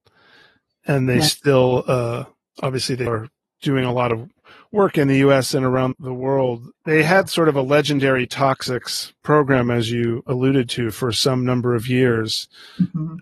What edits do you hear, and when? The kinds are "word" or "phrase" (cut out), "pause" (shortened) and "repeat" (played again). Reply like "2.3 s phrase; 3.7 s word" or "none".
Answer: 3.1 s word; 5.9 s word; 6.7 s word